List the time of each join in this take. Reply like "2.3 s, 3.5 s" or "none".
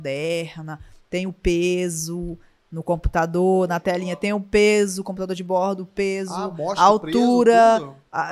none